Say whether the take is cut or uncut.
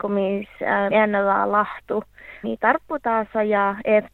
cut